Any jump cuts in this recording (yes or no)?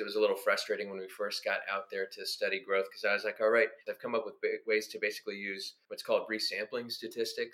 yes